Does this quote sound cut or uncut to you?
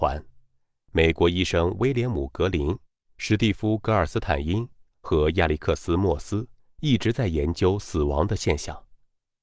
uncut